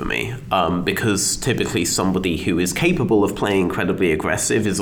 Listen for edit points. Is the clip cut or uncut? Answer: uncut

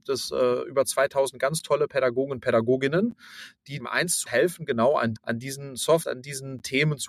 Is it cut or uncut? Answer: cut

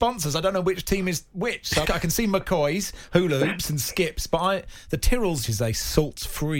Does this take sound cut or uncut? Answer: cut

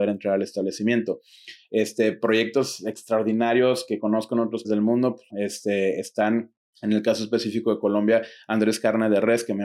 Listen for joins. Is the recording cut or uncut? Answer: cut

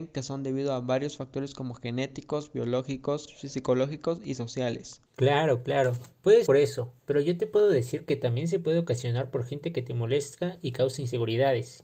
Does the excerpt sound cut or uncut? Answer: cut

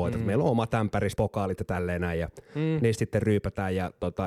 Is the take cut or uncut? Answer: cut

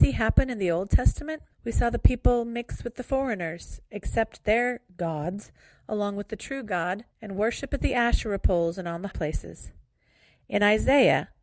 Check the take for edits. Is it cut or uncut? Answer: cut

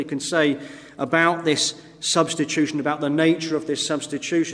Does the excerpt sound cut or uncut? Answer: uncut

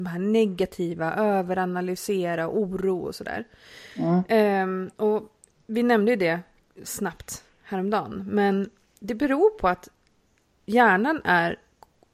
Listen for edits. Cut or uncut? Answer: uncut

